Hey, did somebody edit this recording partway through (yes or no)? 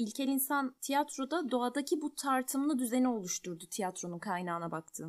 no